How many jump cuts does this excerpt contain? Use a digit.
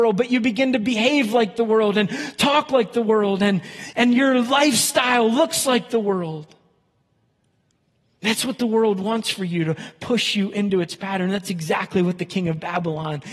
0